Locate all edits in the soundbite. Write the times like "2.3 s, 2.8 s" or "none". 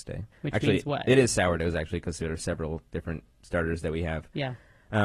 3.3 s